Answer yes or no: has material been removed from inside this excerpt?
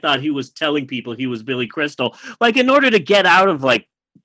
no